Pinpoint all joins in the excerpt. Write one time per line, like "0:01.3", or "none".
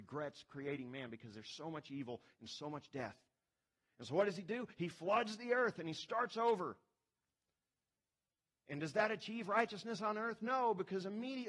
none